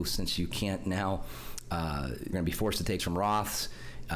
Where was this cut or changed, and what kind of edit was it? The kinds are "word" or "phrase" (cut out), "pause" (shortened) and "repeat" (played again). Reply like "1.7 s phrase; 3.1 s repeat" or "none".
2.3 s word; 3.0 s word